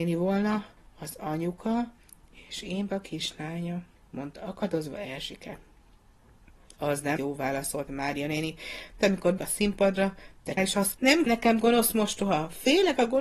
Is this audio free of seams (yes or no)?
no